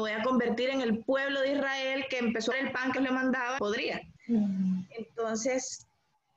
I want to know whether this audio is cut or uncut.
cut